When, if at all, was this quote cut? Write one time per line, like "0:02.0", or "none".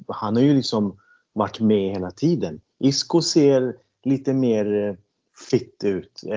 none